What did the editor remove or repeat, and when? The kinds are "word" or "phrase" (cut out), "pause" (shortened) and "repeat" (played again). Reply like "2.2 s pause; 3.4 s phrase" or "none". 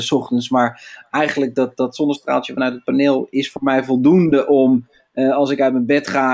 none